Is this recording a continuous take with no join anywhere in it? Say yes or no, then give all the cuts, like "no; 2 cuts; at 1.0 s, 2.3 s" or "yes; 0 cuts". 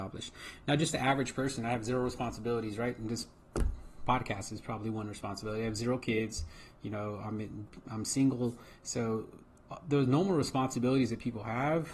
yes; 0 cuts